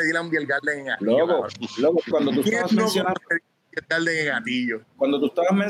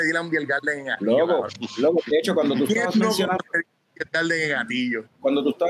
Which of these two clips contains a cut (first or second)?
first